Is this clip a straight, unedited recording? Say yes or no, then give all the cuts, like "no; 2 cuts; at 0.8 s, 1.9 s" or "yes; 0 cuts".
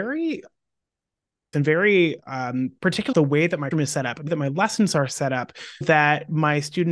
no; 5 cuts; at 1.5 s, 3.1 s, 3.7 s, 4.3 s, 5.8 s